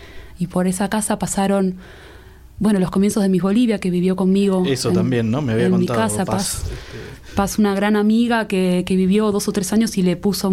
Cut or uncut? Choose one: uncut